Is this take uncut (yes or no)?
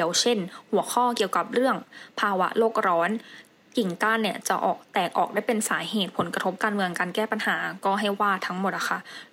yes